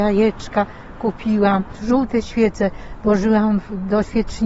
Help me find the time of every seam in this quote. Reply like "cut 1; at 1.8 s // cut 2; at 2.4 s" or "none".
none

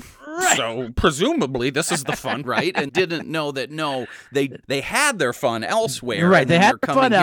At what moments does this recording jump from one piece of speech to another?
cut 1; at 2.4 s // cut 2; at 2.9 s // cut 3; at 4.6 s

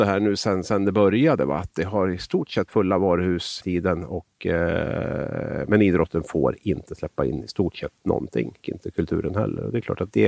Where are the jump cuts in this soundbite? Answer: cut 1; at 2.7 s // cut 2; at 3.6 s // cut 3; at 8.6 s

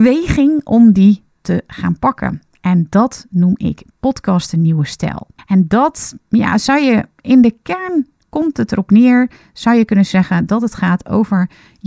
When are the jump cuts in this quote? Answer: cut 1; at 5.4 s

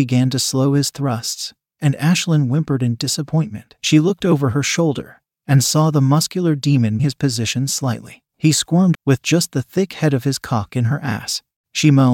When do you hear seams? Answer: cut 1; at 3.8 s // cut 2; at 7.0 s // cut 3; at 8.3 s // cut 4; at 8.9 s

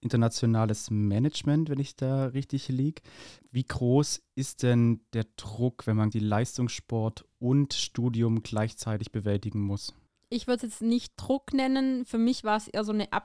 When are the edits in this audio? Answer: cut 1; at 6.1 s

